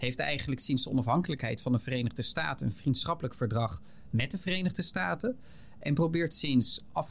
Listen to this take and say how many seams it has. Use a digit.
0